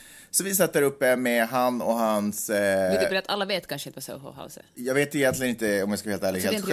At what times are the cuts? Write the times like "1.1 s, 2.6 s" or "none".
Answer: none